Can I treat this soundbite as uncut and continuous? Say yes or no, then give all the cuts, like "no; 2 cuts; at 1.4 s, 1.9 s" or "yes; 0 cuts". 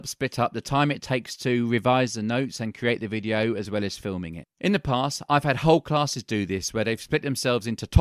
yes; 0 cuts